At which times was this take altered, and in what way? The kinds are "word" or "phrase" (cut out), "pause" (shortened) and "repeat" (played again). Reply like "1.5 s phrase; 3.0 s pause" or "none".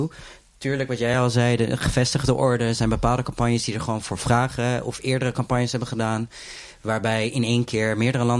none